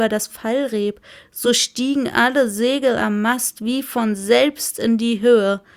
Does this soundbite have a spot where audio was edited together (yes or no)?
no